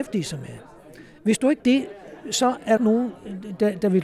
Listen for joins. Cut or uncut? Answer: cut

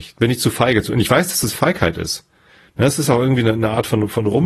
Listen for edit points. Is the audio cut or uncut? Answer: uncut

